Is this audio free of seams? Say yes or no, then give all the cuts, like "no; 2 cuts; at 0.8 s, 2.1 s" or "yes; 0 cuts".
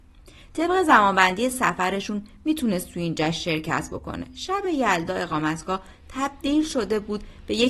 yes; 0 cuts